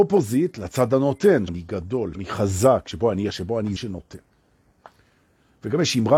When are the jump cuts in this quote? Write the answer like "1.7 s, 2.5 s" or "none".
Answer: 1.5 s, 2.1 s, 3.3 s, 3.8 s